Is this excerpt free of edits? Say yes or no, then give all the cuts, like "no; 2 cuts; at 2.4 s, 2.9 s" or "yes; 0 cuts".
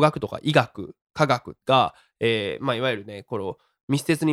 no; 1 cut; at 1.6 s